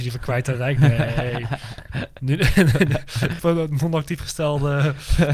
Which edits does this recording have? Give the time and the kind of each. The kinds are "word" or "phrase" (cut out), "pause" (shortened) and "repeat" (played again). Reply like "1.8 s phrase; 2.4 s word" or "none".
3.4 s phrase